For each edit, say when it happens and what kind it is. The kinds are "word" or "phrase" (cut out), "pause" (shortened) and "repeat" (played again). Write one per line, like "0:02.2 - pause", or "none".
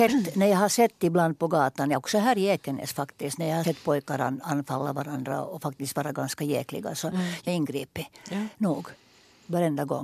0:03.6 - word
0:07.5 - word

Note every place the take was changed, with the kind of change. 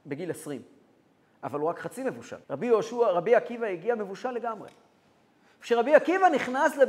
0:02.4 - pause

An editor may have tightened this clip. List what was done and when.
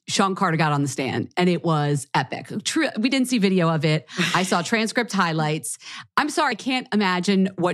0:06.5 - word

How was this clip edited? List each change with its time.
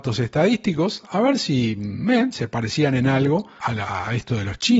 0:03.6 - word

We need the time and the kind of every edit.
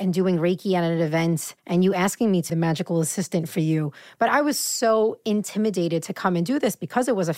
0:01.6 - pause
0:02.5 - word

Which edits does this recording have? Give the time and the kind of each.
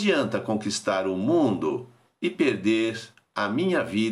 none

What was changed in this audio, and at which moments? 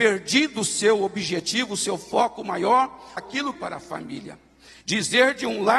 0:03.2 - word
0:03.5 - phrase

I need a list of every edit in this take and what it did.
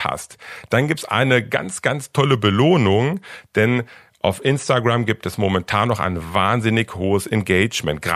none

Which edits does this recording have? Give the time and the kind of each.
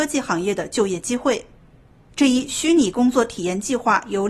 none

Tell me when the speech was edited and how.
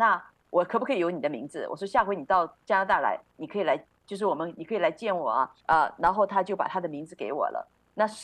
0:03.3 - pause
0:05.6 - pause

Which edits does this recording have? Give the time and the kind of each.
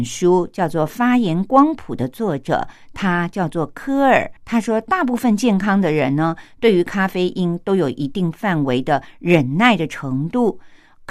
0:04.4 - pause

